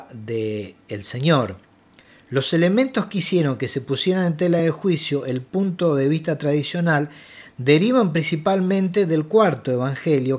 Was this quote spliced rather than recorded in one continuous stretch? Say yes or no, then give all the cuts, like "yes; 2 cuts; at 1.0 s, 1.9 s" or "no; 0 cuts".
no; 0 cuts